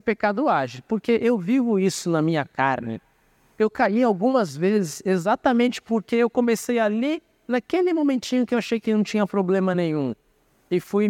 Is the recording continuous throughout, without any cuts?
yes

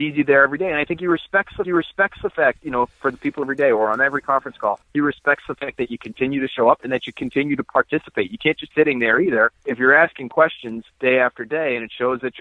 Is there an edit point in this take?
yes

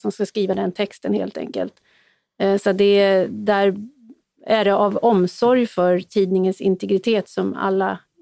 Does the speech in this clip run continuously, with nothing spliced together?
yes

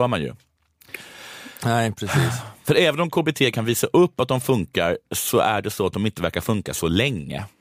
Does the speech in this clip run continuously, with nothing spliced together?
yes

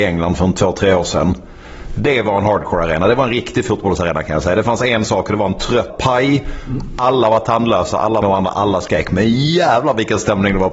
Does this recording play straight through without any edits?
no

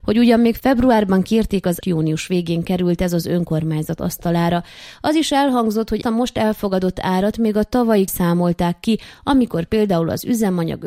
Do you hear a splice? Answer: yes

